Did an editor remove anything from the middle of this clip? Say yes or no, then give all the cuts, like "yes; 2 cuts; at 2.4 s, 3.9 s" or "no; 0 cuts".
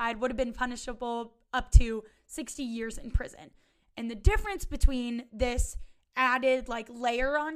no; 0 cuts